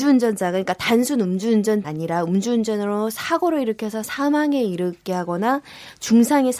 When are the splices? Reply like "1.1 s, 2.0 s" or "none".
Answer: 1.8 s, 4.0 s